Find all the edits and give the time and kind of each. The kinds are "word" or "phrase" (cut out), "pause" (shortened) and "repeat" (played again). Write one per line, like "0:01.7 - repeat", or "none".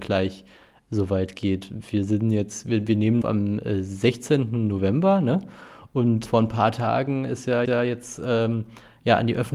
0:03.2 - phrase
0:06.3 - word
0:07.7 - repeat

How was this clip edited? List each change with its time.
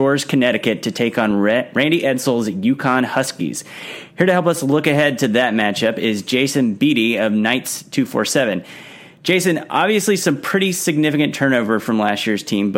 none

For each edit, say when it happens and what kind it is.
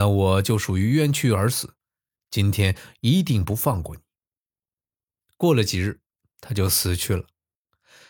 none

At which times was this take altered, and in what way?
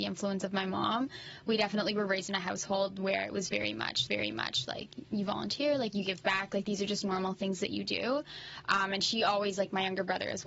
0:04.1 - repeat

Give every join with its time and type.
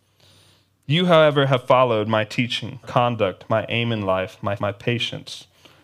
0:02.8 - word
0:04.6 - word

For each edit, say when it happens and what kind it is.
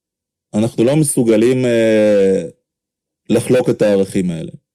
none

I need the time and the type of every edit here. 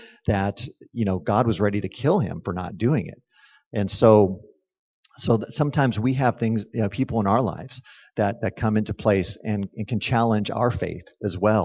none

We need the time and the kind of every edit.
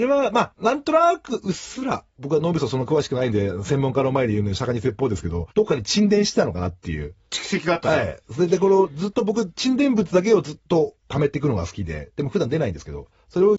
0:02.1 - pause
0:05.5 - pause

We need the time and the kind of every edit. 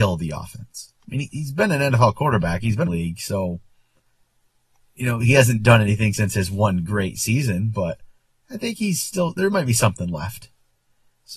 0:01.0 - pause
0:02.9 - phrase

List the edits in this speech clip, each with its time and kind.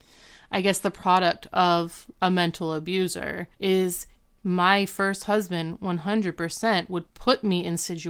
0:02.1 - word
0:03.5 - pause

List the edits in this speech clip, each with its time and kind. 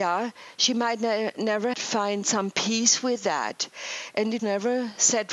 0:01.7 - word
0:04.4 - word

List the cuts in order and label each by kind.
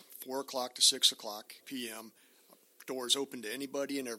0:01.6 - word

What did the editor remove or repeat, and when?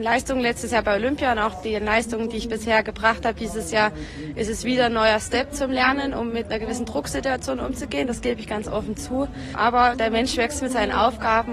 none

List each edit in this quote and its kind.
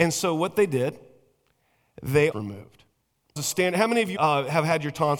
0:02.3 - phrase
0:03.4 - phrase
0:04.2 - word

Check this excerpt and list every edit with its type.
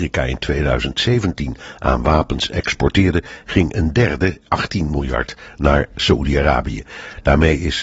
none

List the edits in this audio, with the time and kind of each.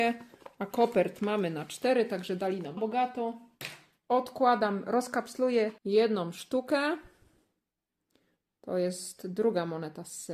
0:02.8 - word
0:05.8 - pause

